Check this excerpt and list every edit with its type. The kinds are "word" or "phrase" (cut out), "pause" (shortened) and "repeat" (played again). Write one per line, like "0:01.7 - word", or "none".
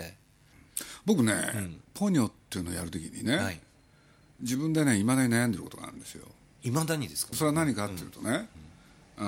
0:01.8 - pause
0:07.3 - phrase